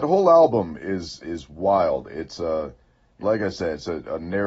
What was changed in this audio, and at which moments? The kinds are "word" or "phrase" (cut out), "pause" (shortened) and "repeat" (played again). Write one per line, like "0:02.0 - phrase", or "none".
0:03.2 - word